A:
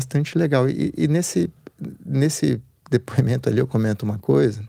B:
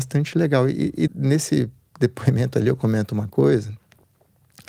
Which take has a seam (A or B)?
B